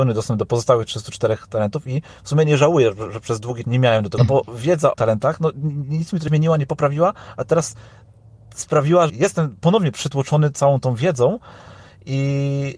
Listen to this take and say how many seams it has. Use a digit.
5